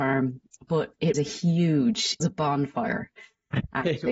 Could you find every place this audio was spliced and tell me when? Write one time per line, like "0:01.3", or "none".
0:01.1
0:02.2